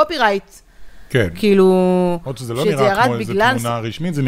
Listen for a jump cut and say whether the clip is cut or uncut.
uncut